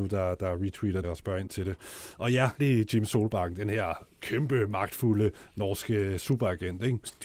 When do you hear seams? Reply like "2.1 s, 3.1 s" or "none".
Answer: 1.0 s, 2.6 s, 4.1 s